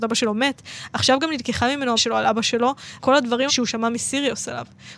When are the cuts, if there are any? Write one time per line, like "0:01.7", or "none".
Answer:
0:02.0
0:03.0
0:03.5